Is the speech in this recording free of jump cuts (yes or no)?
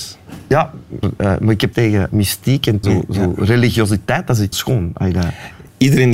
no